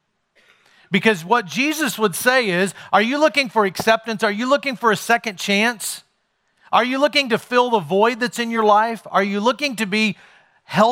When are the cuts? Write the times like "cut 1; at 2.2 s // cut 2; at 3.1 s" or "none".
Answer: none